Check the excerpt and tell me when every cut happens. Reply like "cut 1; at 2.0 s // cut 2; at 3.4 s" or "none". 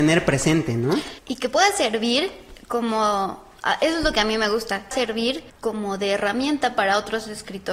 cut 1; at 1.2 s // cut 2; at 4.9 s // cut 3; at 5.5 s